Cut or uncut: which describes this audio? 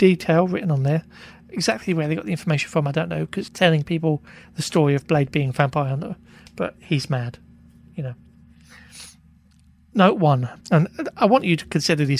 cut